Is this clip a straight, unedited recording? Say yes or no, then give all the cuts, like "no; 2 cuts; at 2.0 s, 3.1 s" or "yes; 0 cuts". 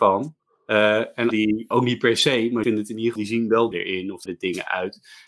no; 6 cuts; at 1.3 s, 1.7 s, 2.6 s, 3.2 s, 3.7 s, 4.3 s